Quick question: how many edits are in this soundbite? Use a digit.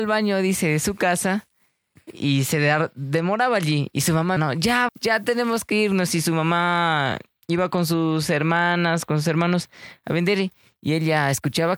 2